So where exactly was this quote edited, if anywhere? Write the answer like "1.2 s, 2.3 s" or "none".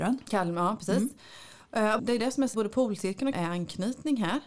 2.0 s, 2.5 s, 3.3 s